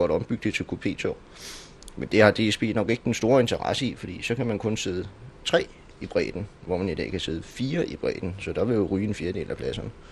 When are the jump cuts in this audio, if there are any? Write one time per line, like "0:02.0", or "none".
none